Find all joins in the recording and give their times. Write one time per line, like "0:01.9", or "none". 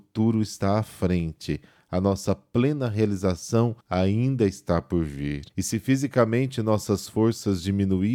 0:03.8
0:05.5